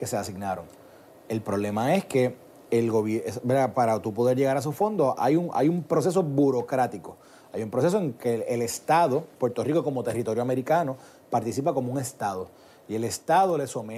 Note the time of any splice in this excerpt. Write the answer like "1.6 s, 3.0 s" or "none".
none